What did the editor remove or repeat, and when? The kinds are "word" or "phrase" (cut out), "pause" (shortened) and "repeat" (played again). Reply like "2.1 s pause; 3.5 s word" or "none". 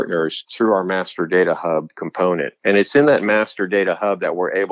2.6 s pause